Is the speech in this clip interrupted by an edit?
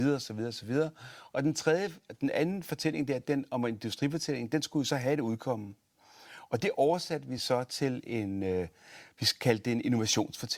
no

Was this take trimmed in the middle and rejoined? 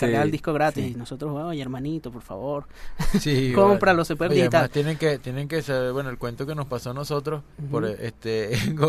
yes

